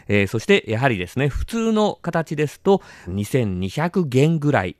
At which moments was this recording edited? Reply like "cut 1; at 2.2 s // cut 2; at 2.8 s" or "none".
cut 1; at 3.1 s